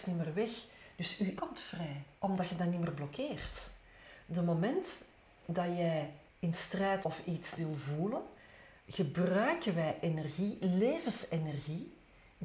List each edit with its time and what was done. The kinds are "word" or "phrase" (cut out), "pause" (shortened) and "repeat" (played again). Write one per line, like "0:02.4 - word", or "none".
0:01.4 - word
0:02.1 - pause
0:06.3 - pause
0:07.0 - word
0:07.5 - word
0:08.8 - pause